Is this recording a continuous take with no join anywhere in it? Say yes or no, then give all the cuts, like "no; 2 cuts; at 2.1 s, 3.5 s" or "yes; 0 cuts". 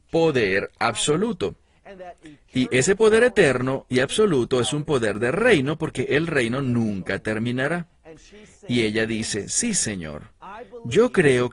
yes; 0 cuts